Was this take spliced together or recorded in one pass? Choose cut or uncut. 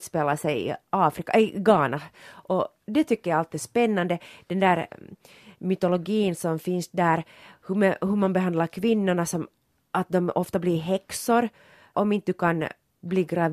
uncut